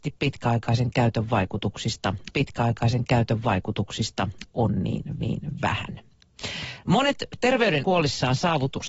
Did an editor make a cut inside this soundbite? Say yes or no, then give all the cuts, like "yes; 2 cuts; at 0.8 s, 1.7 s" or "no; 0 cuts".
yes; 3 cuts; at 2.3 s, 5.2 s, 7.8 s